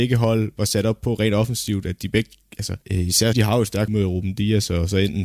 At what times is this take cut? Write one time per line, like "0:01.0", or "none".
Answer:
0:02.8
0:03.3
0:03.9